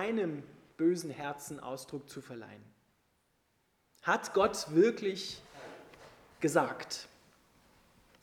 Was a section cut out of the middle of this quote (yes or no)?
no